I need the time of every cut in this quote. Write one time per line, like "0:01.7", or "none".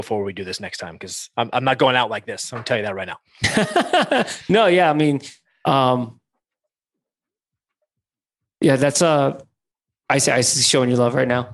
none